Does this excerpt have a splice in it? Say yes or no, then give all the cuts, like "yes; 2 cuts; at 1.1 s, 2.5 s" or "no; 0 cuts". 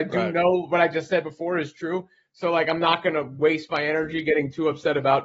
no; 0 cuts